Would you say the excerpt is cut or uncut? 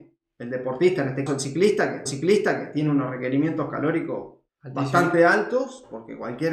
cut